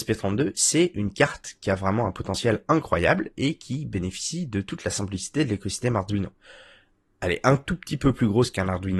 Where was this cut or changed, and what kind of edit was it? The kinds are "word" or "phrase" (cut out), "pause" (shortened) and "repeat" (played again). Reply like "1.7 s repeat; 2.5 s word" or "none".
none